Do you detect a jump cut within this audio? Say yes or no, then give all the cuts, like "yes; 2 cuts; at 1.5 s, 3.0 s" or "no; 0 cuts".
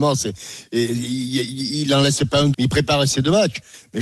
yes; 1 cut; at 2.5 s